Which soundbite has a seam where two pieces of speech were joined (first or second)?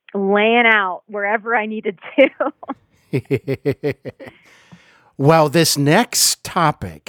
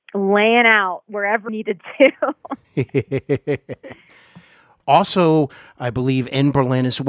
second